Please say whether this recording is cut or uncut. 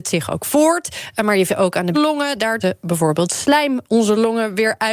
cut